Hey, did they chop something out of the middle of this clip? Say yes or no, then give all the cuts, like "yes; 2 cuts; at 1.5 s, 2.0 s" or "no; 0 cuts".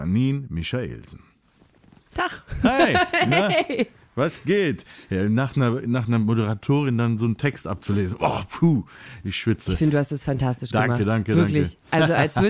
no; 0 cuts